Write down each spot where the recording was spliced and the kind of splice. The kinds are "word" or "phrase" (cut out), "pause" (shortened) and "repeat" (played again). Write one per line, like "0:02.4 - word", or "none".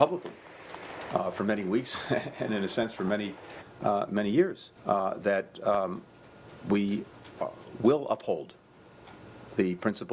0:04.7 - pause

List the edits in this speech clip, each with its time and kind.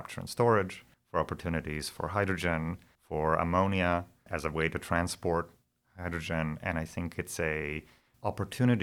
none

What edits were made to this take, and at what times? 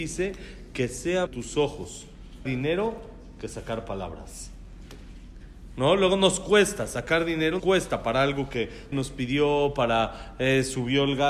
0:01.3 - phrase
0:02.4 - word
0:07.6 - word
0:08.9 - word

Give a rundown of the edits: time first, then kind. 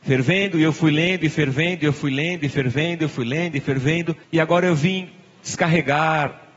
0:04.2 - pause

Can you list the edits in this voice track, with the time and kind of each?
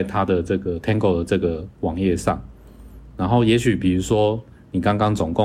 none

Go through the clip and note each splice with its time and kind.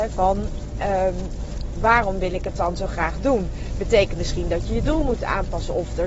0:04.1 - word

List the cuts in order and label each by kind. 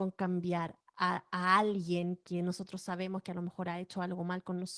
none

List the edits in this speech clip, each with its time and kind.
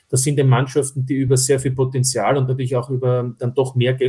none

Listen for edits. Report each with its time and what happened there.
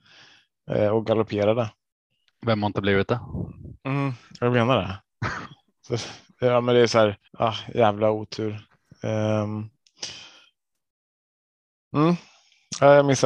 0:07.3 - pause

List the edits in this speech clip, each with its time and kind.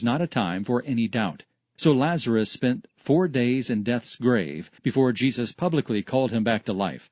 0:04.8 - pause

